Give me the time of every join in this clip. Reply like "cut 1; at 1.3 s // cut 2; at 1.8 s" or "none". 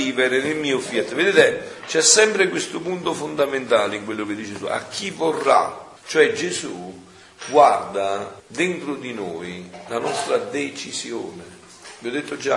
cut 1; at 6.0 s // cut 2; at 8.4 s